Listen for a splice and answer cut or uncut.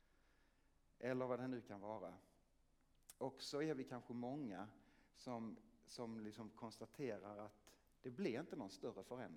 uncut